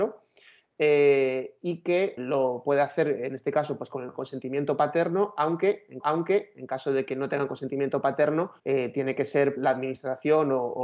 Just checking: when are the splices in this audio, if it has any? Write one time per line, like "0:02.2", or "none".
0:02.2
0:06.0
0:08.6
0:09.6